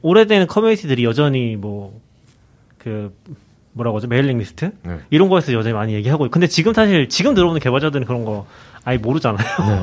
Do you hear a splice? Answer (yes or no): no